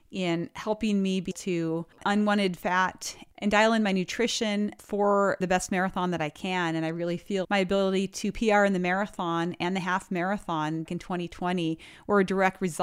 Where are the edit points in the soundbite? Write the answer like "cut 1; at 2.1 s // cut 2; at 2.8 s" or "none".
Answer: cut 1; at 1.3 s // cut 2; at 2.0 s // cut 3; at 5.4 s // cut 4; at 7.4 s // cut 5; at 10.9 s